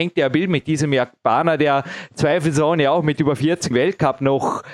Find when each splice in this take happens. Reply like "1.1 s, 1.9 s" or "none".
3.7 s